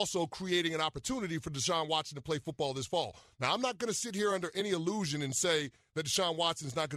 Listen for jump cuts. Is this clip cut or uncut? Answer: uncut